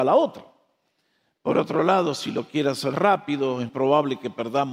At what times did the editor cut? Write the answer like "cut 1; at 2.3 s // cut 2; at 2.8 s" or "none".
cut 1; at 2.9 s // cut 2; at 3.7 s